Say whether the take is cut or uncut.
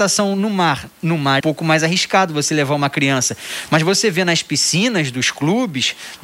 cut